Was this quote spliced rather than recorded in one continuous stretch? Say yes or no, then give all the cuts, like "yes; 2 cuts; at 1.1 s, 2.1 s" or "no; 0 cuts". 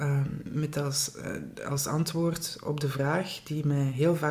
no; 0 cuts